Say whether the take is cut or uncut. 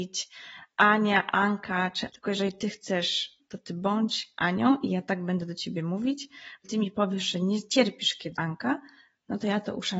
cut